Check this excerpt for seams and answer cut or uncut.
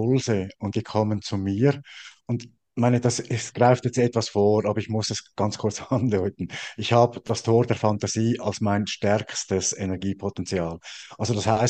uncut